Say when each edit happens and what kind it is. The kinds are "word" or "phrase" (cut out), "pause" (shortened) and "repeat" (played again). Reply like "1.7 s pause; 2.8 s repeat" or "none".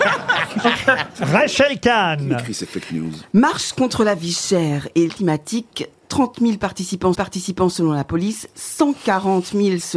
5.1 s word; 7.1 s repeat

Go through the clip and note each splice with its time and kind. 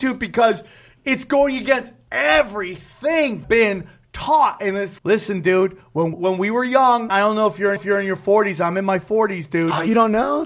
3.4 s phrase; 5.0 s word; 6.1 s phrase; 7.1 s word; 7.8 s repeat

